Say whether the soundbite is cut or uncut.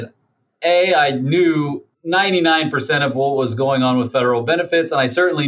cut